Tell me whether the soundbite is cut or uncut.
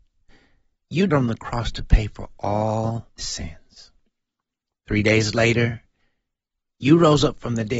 cut